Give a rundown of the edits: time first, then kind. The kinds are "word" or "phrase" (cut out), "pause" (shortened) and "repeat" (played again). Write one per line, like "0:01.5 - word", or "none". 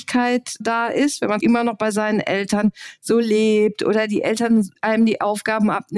0:01.4 - phrase